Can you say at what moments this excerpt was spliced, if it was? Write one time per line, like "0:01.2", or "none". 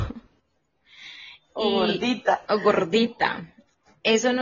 0:02.5